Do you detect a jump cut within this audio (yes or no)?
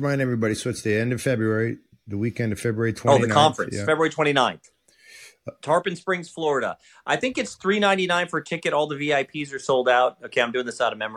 no